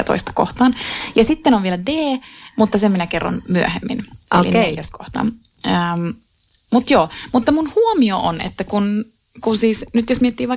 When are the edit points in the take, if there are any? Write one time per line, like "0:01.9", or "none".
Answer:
none